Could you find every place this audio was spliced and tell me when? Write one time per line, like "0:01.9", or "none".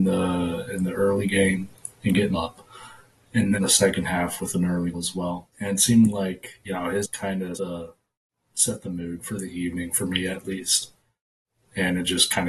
0:02.3
0:03.5
0:04.9
0:05.5
0:06.7
0:07.0
0:07.5
0:09.2